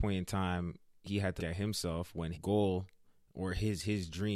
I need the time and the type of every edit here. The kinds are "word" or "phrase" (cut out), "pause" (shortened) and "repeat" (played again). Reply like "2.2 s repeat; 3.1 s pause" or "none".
1.4 s word; 2.3 s word